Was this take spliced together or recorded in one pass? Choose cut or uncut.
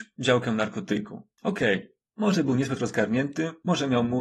cut